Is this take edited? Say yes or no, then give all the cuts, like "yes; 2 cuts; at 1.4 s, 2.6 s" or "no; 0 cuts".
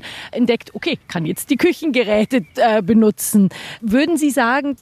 yes; 1 cut; at 1.0 s